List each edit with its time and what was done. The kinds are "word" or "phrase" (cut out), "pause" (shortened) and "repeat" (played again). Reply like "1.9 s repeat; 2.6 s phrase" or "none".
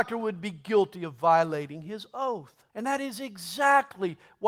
2.7 s pause